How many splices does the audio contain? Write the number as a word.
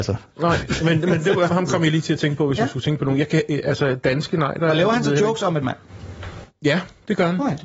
two